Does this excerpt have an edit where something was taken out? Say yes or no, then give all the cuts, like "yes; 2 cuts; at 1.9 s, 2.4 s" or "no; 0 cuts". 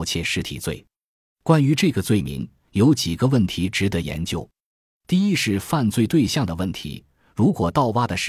no; 0 cuts